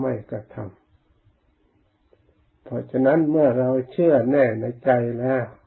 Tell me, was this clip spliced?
no; 0 cuts

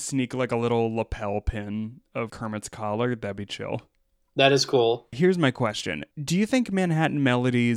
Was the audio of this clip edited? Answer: yes; 2 cuts; at 2.3 s, 6.1 s

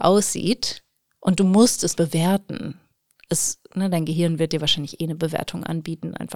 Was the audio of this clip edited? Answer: yes; 1 cut; at 2.0 s

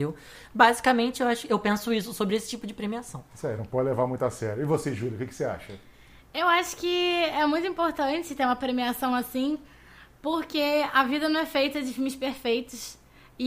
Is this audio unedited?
yes; 0 cuts

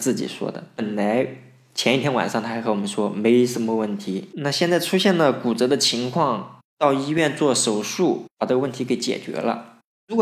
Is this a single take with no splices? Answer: no; 2 cuts; at 4.3 s, 6.7 s

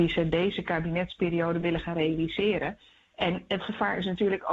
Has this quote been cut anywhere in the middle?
no; 0 cuts

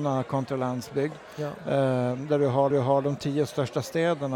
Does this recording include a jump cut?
yes; 1 cut; at 2.7 s

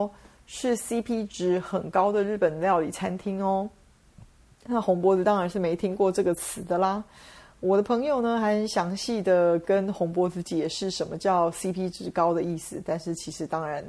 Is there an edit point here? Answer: no; 0 cuts

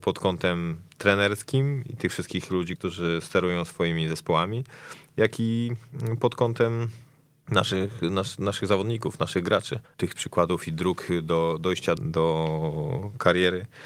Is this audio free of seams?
no; 3 cuts; at 2.8 s, 10.2 s, 12.0 s

